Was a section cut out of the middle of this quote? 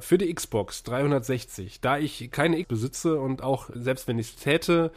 yes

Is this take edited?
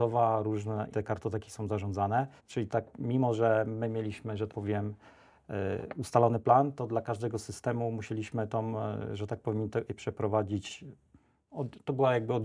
yes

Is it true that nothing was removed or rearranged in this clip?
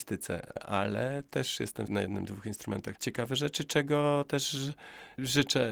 no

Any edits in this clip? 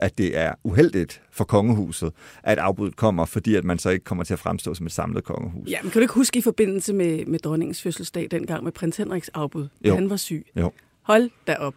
no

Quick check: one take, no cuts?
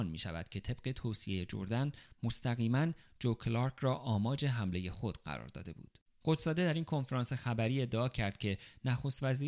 yes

